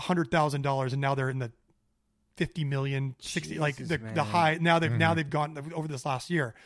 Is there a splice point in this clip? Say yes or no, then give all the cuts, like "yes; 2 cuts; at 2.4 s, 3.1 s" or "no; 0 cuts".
no; 0 cuts